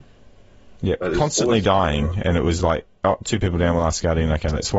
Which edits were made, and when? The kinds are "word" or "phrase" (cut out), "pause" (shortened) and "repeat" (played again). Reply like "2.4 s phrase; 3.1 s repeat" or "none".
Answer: none